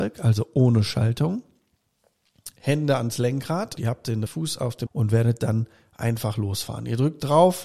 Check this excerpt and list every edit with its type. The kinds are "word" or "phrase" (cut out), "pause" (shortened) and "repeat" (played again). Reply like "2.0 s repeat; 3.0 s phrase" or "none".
2.6 s pause; 3.8 s word; 4.3 s word; 4.9 s word